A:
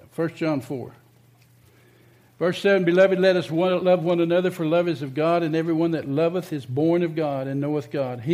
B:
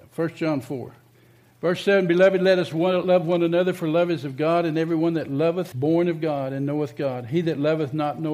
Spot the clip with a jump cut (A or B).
B